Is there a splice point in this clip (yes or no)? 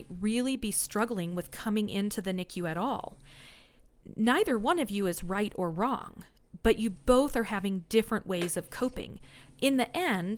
no